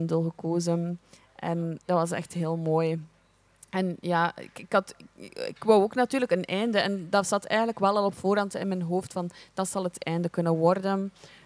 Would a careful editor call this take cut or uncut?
uncut